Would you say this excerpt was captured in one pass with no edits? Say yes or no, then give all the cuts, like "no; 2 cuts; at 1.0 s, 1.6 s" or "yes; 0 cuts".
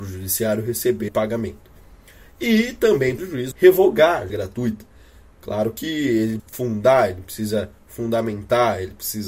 no; 5 cuts; at 1.1 s, 3.2 s, 3.5 s, 4.3 s, 6.4 s